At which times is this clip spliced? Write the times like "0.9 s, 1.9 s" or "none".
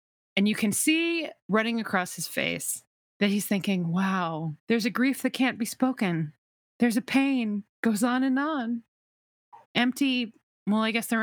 1.4 s, 2.9 s, 4.6 s, 6.5 s, 7.7 s, 9.6 s